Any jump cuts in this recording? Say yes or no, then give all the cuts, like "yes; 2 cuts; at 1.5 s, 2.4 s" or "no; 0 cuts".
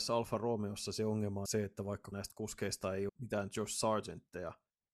yes; 3 cuts; at 1.5 s, 2.1 s, 3.1 s